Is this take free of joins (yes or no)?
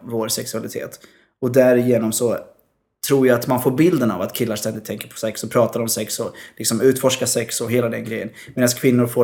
yes